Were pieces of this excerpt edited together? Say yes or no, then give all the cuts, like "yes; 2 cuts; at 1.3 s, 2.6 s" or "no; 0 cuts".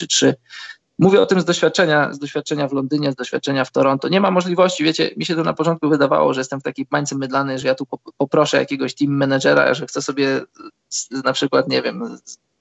no; 0 cuts